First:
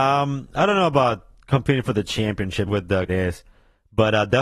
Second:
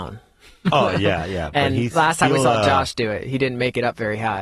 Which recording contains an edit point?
first; 2 cuts; at 2.7 s, 3.1 s

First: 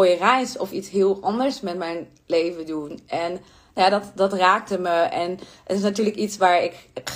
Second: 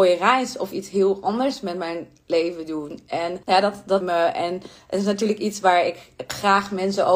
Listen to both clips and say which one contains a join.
second; 2 cuts; at 3.4 s, 4.0 s

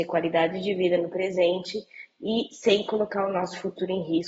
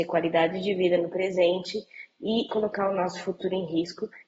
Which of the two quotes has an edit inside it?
second; 1 cut; at 2.5 s

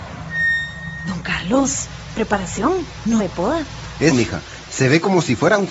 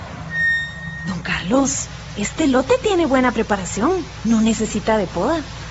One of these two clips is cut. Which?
first; 3 cuts; at 2.1 s, 3.2 s, 4.1 s

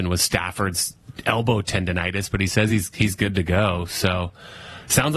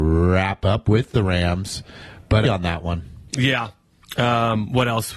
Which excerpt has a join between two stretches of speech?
second; 2 cuts; at 2.4 s, 3.3 s

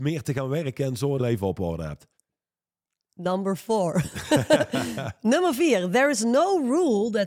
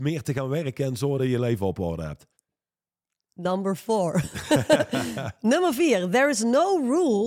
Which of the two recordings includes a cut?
first; 1 cut; at 1.2 s

